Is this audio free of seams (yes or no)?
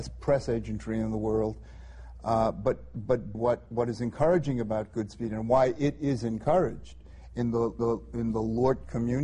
no